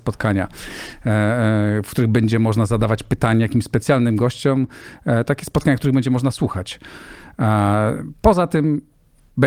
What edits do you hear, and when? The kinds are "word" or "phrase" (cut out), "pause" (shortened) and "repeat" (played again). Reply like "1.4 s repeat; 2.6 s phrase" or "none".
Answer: none